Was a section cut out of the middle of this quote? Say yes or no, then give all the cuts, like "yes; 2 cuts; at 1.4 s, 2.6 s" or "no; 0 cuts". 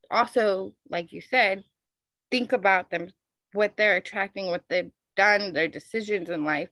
no; 0 cuts